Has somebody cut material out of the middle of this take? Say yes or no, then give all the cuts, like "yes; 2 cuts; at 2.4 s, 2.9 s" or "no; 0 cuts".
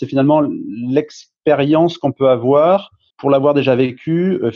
yes; 1 cut; at 3.1 s